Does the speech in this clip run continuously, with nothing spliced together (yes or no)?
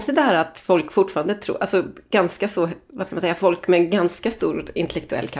yes